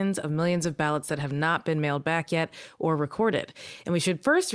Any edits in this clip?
no; 0 cuts

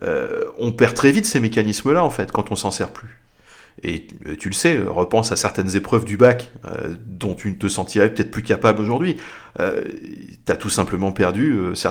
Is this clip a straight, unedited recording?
yes; 0 cuts

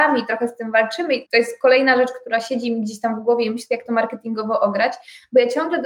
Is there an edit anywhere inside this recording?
yes; 1 cut; at 1.3 s

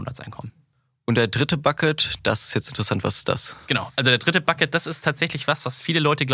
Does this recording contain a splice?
no; 0 cuts

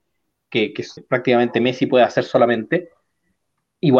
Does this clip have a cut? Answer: yes; 1 cut; at 1.0 s

